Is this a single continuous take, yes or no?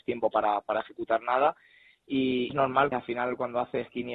no